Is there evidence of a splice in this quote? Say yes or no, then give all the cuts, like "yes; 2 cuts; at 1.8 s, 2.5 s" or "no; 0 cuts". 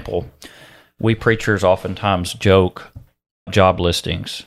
yes; 1 cut; at 3.5 s